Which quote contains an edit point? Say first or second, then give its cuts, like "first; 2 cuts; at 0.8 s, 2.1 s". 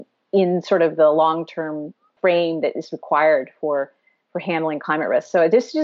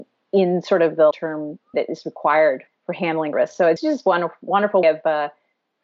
second; 6 cuts; at 1.1 s, 1.7 s, 2.7 s, 3.3 s, 3.8 s, 4.8 s